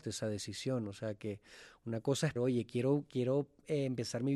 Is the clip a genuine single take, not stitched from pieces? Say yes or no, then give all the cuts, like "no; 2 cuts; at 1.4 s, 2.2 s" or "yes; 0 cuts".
no; 1 cut; at 2.4 s